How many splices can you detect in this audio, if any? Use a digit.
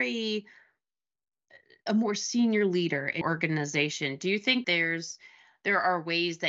3